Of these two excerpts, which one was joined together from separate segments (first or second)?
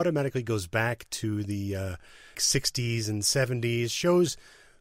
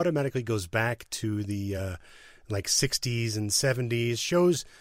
first